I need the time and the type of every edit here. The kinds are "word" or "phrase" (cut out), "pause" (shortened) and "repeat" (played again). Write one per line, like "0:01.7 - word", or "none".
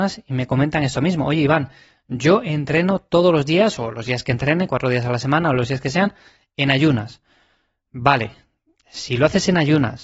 none